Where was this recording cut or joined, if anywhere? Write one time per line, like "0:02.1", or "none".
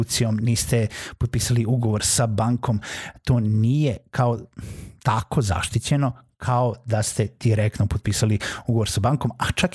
none